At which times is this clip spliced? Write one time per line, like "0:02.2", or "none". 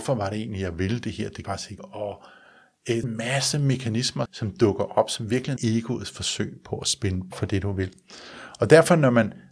0:01.4
0:01.8
0:03.0
0:04.3
0:05.6
0:07.3